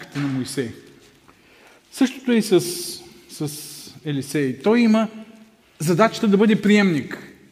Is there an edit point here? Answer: yes; 1 cut; at 5.6 s

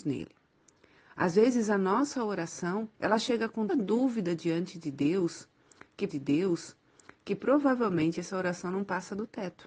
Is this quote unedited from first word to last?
no; 3 cuts; at 2.9 s, 3.7 s, 6.1 s

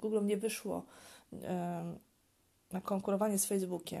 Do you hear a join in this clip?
no; 0 cuts

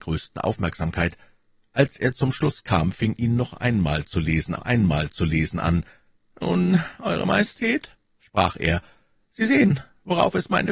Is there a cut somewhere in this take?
yes; 2 cuts; at 3.2 s, 4.5 s

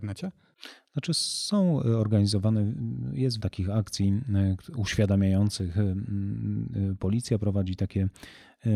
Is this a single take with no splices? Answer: no; 1 cut; at 3.4 s

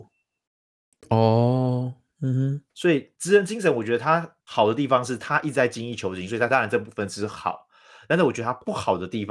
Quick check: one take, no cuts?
no; 3 cuts; at 2.7 s, 3.2 s, 4.4 s

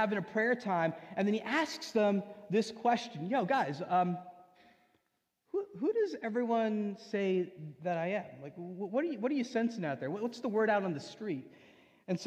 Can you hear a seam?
no; 0 cuts

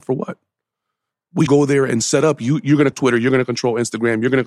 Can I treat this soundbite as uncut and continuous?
no; 2 cuts; at 1.5 s, 2.9 s

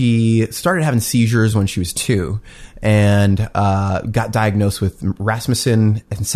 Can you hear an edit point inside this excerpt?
no; 0 cuts

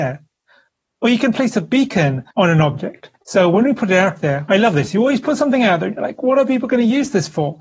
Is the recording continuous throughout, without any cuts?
no; 2 cuts; at 2.3 s, 3.2 s

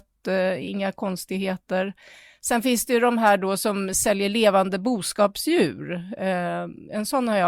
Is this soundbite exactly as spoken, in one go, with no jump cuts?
yes; 0 cuts

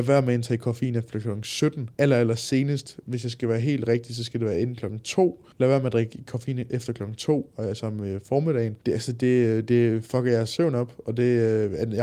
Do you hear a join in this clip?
yes; 3 cuts; at 1.9 s, 5.5 s, 8.8 s

